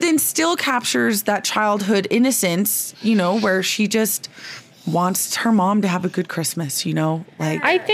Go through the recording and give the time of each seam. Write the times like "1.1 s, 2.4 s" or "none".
none